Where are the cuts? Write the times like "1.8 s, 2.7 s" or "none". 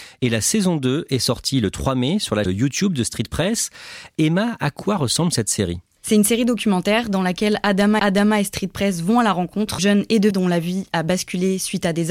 2.5 s, 8.0 s, 9.8 s, 10.3 s